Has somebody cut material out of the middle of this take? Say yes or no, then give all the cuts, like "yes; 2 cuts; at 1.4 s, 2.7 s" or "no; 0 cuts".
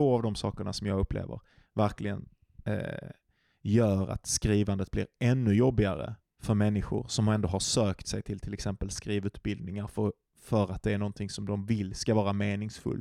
no; 0 cuts